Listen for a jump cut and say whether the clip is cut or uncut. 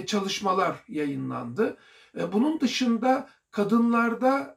uncut